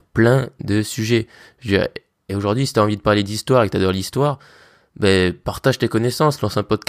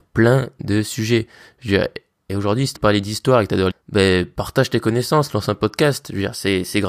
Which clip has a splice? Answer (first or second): second